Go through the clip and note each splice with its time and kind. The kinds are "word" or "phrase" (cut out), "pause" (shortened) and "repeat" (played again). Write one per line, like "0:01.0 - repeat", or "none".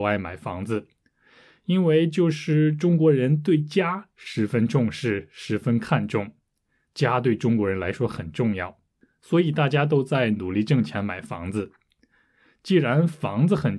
none